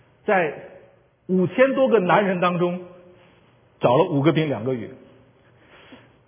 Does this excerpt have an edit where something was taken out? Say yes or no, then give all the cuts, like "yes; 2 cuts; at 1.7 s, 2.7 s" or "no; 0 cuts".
no; 0 cuts